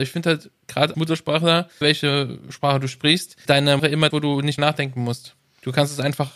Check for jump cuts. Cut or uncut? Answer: cut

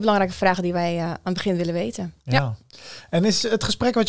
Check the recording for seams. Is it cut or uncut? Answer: uncut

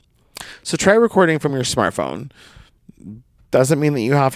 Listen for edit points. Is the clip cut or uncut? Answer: uncut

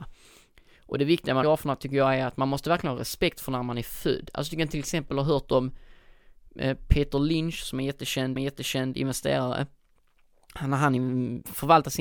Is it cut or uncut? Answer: cut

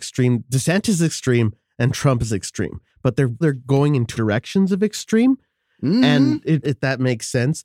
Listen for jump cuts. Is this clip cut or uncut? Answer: cut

